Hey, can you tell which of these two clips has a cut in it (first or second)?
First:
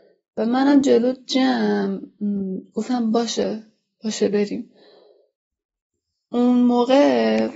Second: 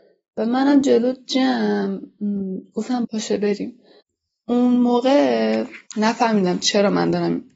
second